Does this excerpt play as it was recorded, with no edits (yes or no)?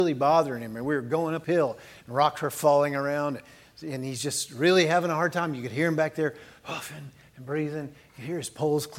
no